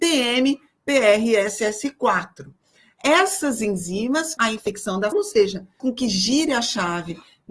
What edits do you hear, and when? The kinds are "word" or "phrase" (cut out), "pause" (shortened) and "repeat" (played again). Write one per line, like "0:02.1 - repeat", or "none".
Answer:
0:04.4 - word
0:05.1 - word
0:05.8 - word

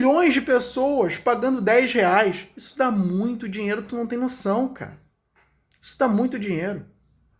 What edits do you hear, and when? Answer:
none

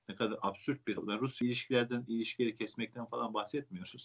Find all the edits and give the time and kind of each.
0:01.0 - word
0:01.4 - word

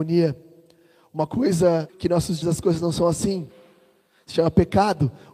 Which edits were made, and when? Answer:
0:01.9 - word
0:02.4 - word

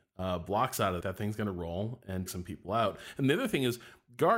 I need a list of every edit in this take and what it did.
0:01.0 - word
0:02.3 - word

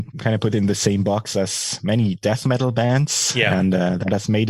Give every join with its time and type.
none

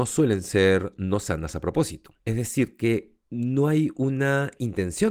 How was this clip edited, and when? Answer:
0:02.2 - pause
0:03.2 - pause

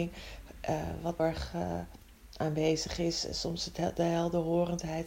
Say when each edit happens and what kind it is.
0:01.2 - phrase

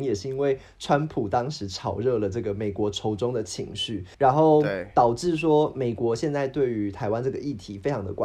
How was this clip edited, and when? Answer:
0:04.1 - pause

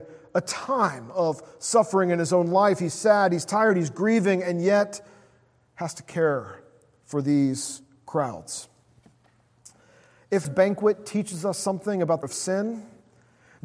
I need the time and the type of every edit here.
0:10.4 - word
0:12.2 - phrase

